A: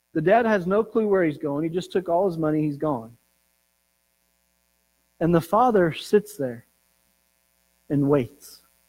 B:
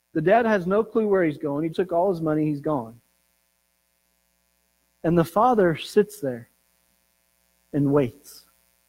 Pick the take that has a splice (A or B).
B